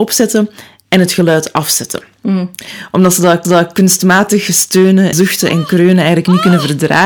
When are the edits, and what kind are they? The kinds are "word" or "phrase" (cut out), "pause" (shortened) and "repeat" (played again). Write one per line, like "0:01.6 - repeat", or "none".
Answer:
0:03.4 - repeat
0:05.1 - word